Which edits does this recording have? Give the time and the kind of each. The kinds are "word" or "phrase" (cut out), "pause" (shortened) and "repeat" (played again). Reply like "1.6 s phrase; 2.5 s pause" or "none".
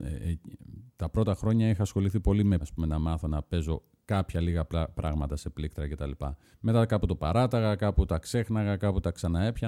2.6 s word; 6.5 s pause